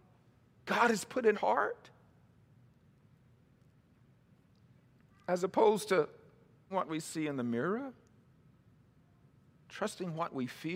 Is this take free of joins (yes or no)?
no